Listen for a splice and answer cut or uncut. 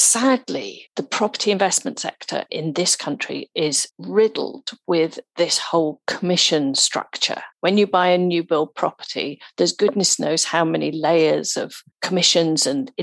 cut